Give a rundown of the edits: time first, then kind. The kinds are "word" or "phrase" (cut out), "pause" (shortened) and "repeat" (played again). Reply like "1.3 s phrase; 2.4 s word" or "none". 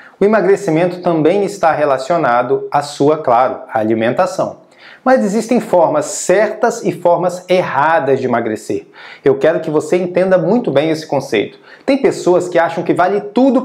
none